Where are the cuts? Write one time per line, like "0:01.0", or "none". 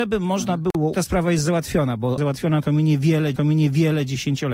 0:00.9
0:02.2
0:03.4